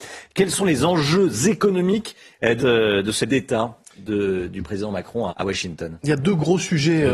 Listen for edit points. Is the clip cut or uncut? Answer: cut